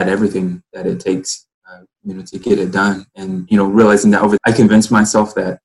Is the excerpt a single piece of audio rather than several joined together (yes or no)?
no